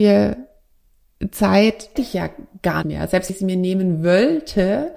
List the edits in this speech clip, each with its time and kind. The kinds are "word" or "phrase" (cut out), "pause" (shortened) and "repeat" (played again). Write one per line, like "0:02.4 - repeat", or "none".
0:02.0 - word
0:02.8 - word
0:03.3 - word